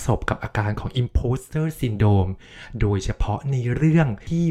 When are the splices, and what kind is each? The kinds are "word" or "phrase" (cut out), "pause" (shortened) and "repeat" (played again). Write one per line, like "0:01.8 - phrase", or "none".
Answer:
none

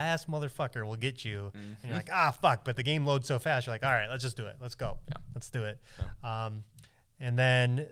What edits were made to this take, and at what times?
none

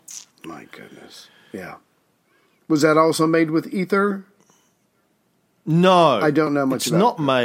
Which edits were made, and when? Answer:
none

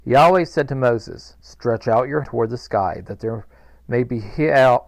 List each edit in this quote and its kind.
0:02.2 - word

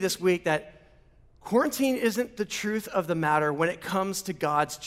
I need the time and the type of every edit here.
none

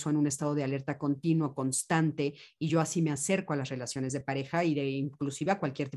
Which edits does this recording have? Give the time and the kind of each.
none

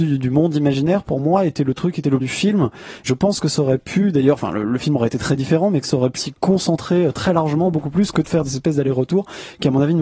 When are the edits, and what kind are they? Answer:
0:02.2 - phrase
0:03.1 - word
0:06.2 - word

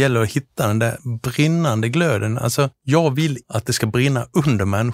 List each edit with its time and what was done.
0:02.7 - pause
0:03.4 - word

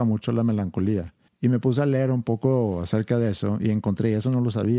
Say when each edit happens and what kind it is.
0:01.3 - pause

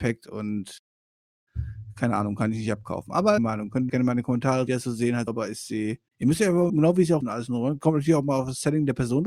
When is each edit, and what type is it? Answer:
0:03.4 - phrase
0:03.9 - word
0:04.7 - phrase
0:05.3 - word
0:06.1 - pause
0:06.7 - phrase
0:07.2 - phrase

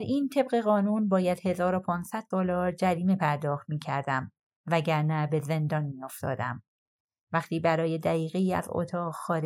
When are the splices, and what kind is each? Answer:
none

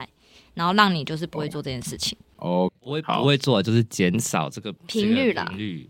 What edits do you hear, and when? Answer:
0:02.7 - word
0:04.8 - pause

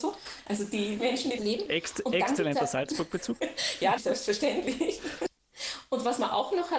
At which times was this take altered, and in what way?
0:01.0 - word
0:01.4 - phrase
0:03.4 - word
0:04.0 - word

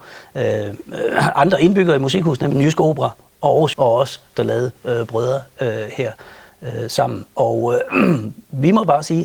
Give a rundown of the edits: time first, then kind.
0:03.7 - word

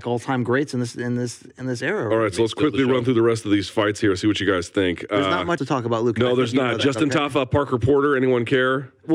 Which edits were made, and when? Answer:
0:05.6 - word

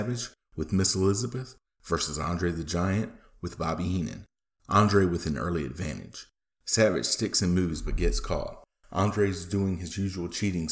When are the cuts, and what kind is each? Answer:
none

